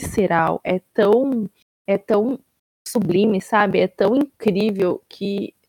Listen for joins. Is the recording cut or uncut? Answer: uncut